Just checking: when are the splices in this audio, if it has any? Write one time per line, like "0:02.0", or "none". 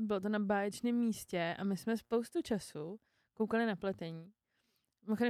none